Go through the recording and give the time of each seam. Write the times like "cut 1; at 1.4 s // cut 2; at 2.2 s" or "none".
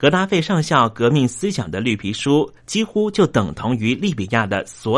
cut 1; at 2.6 s